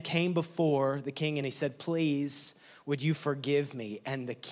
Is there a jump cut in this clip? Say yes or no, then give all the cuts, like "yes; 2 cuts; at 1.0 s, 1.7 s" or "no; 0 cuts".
no; 0 cuts